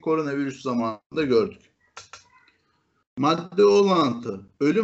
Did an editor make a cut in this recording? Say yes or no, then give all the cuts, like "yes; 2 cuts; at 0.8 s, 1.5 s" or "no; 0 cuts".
no; 0 cuts